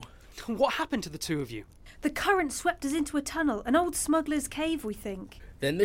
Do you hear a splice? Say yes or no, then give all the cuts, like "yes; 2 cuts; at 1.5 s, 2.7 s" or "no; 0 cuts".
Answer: no; 0 cuts